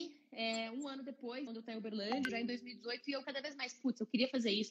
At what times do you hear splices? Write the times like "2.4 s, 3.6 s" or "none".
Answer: 1.5 s, 2.3 s, 3.2 s